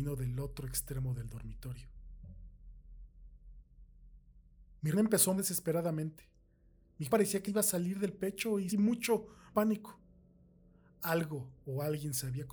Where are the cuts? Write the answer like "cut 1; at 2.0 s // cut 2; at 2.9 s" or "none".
cut 1; at 4.9 s // cut 2; at 5.4 s // cut 3; at 7.1 s // cut 4; at 7.5 s // cut 5; at 8.7 s // cut 6; at 9.5 s